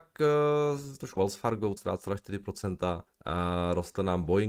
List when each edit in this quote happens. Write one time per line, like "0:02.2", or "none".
0:01.2
0:01.8
0:03.1